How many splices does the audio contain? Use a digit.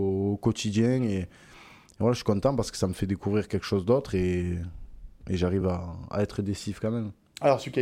0